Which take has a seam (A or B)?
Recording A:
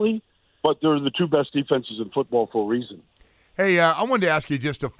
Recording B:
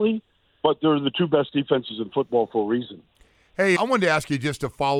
B